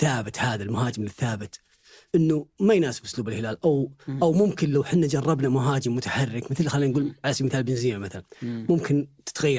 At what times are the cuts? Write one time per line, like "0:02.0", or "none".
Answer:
none